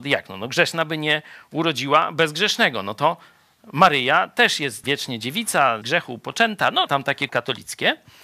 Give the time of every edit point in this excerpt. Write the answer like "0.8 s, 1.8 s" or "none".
4.8 s, 5.8 s, 6.9 s, 7.3 s

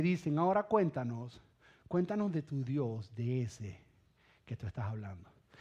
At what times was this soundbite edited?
none

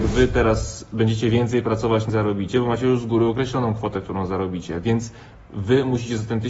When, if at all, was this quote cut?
2.1 s

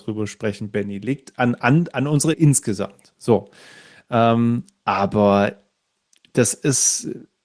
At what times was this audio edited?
2.3 s

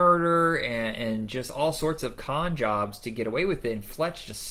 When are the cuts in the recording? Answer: none

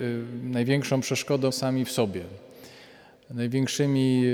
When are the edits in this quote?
1.5 s

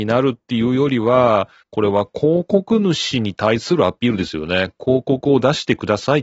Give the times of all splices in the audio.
1.6 s

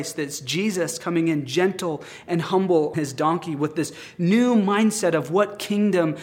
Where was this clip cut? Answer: 2.9 s

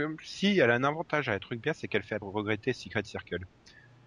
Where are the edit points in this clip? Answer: 2.2 s

